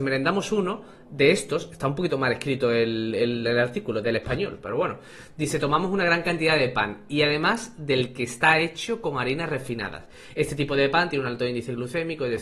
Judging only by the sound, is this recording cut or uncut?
uncut